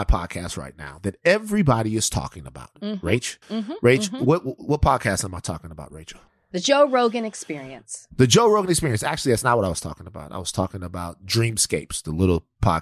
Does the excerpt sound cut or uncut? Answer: cut